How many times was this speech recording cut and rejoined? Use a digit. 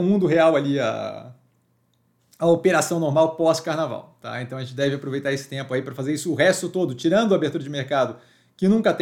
0